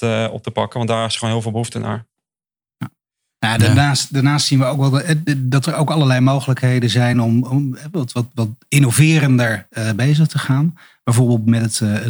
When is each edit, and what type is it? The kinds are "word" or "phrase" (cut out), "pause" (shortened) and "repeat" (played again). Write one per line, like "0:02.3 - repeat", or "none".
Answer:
none